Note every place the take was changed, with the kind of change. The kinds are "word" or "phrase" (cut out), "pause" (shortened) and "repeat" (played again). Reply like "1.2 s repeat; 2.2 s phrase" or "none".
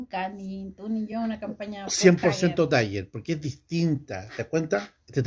none